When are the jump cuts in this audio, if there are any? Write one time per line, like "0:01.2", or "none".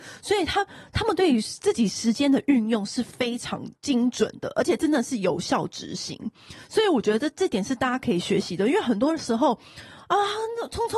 0:03.8

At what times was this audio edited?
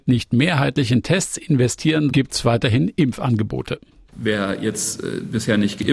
0:02.1

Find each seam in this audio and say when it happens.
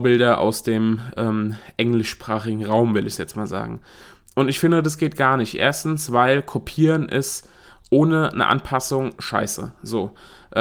none

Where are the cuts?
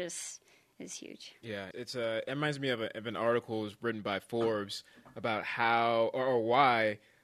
0:01.7

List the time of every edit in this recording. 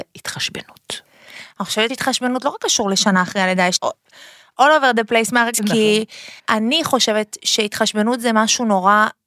0:01.9
0:03.8
0:05.5
0:06.4

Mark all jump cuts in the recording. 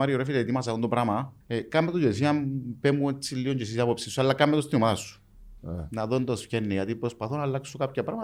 0:01.4
0:05.6

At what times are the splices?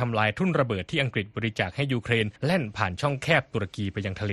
0:02.4

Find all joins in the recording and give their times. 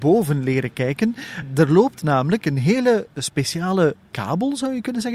0:04.0

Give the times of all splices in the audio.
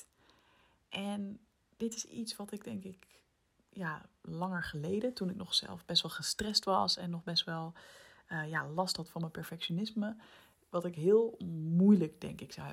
none

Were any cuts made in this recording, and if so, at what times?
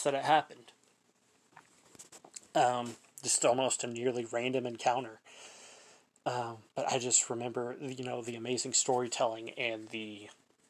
0:06.7

